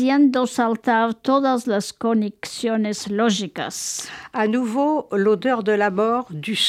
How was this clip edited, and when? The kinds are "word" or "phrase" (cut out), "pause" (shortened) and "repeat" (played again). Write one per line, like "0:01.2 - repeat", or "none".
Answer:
none